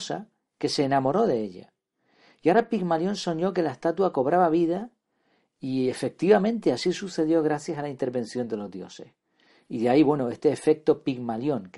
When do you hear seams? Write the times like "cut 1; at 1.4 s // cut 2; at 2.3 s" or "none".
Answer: none